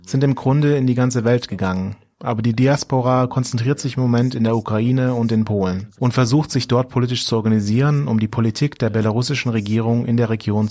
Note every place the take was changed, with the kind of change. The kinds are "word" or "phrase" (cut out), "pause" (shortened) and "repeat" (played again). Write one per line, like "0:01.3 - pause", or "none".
none